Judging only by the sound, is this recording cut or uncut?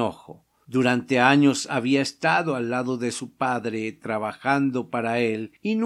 uncut